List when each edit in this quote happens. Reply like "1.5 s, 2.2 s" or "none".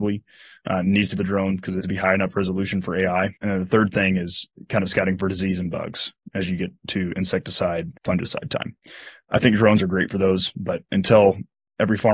1.2 s, 1.8 s, 3.4 s, 8.0 s